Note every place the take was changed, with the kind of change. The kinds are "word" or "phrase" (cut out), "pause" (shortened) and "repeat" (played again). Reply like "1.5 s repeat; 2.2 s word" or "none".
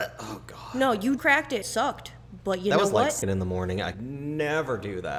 1.2 s word; 1.6 s phrase; 3.2 s word; 3.9 s word